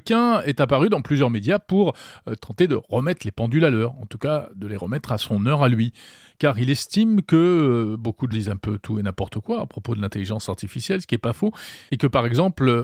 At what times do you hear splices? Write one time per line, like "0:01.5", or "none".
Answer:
0:08.3